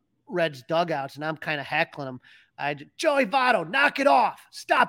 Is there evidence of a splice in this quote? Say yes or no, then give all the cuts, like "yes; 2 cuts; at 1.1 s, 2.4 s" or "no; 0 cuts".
no; 0 cuts